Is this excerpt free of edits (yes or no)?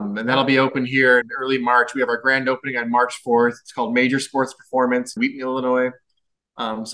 no